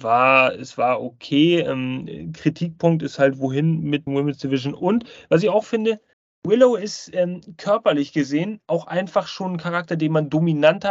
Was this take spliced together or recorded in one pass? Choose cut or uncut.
cut